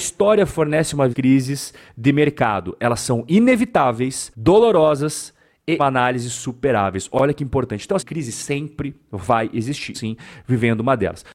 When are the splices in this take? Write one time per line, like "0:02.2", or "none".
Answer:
0:01.1
0:04.3
0:05.8
0:08.0
0:09.9